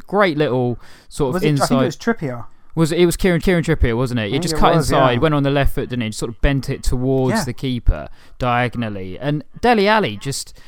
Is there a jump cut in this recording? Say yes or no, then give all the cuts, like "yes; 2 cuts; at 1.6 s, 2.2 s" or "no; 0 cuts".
yes; 1 cut; at 3.4 s